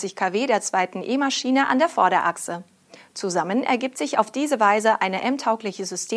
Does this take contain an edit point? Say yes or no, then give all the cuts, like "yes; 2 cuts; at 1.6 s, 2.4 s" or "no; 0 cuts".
no; 0 cuts